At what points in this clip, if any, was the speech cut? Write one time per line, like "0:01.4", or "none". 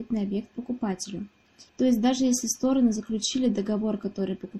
0:01.7